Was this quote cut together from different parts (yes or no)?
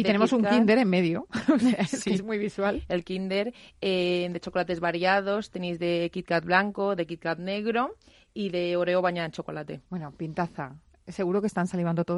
no